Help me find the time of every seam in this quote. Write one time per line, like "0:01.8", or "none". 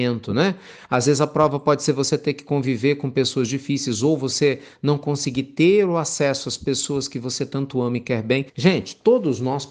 0:08.5